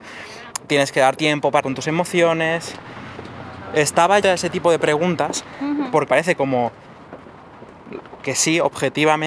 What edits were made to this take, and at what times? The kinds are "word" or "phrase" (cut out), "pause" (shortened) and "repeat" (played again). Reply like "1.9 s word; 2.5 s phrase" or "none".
1.2 s word; 1.6 s word; 4.2 s word; 6.1 s word